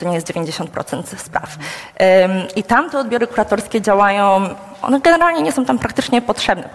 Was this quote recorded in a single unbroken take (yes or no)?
yes